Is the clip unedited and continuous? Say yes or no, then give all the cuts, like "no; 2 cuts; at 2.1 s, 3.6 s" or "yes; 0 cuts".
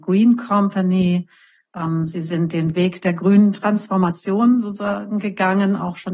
yes; 0 cuts